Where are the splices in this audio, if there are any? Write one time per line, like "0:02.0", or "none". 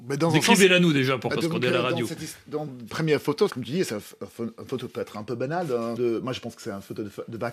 0:01.3
0:02.9
0:03.5
0:06.0